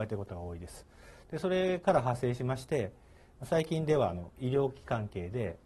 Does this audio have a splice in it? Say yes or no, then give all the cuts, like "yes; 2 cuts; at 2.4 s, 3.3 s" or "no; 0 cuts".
no; 0 cuts